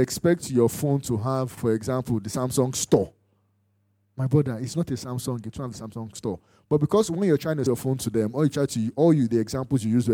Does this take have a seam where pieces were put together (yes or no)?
yes